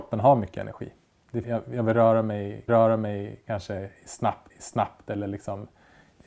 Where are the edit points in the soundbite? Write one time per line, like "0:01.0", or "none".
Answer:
0:01.4
0:02.7
0:04.5